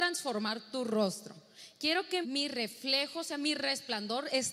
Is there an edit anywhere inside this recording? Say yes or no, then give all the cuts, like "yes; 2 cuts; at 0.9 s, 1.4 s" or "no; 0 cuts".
yes; 1 cut; at 2.2 s